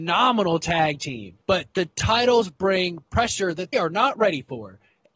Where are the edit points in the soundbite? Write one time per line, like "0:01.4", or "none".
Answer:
0:01.4
0:03.7